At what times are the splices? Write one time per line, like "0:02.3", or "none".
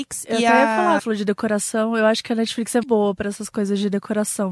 0:01.0
0:02.8

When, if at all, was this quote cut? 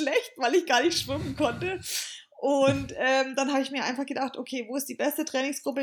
none

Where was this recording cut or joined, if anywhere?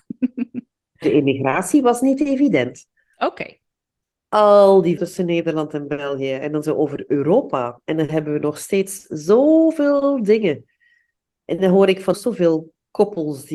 0:01.0
0:05.0
0:06.6
0:12.1

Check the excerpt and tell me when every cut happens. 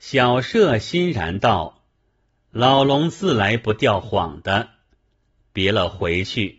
none

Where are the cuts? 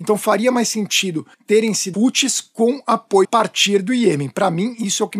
0:01.3
0:01.9
0:03.2

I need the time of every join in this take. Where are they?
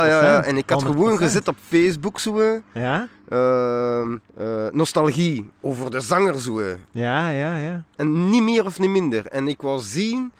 0:04.3
0:05.5
0:07.9

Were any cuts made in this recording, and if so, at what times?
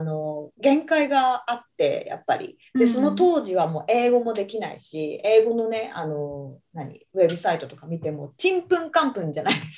0:02.7

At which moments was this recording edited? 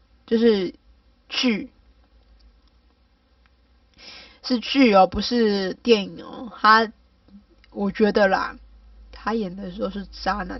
none

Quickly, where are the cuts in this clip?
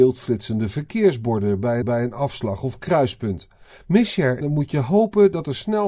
0:01.8
0:04.4

